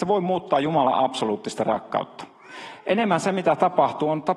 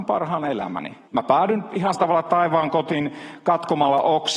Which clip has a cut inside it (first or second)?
second